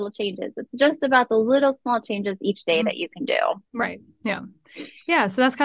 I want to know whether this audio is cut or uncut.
cut